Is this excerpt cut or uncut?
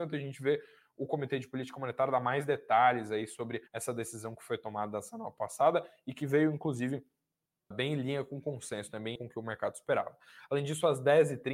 cut